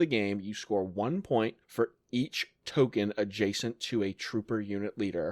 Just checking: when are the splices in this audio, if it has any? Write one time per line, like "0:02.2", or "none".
0:01.6